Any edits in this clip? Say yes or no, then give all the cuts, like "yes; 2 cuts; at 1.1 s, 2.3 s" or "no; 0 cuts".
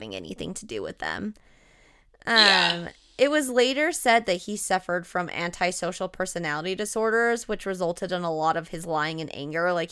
no; 0 cuts